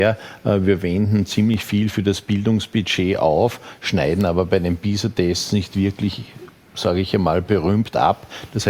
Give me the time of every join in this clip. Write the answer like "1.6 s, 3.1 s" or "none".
none